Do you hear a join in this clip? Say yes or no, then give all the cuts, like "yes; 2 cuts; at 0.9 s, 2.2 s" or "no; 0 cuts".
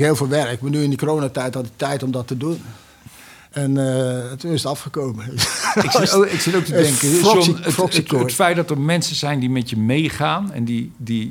no; 0 cuts